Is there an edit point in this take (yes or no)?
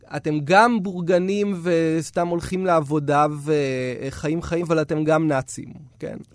yes